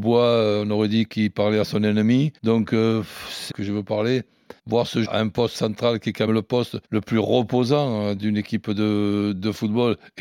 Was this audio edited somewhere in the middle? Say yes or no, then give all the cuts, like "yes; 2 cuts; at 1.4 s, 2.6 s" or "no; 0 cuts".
yes; 7 cuts; at 2.4 s, 3.5 s, 4.6 s, 5.0 s, 5.5 s, 6.3 s, 6.8 s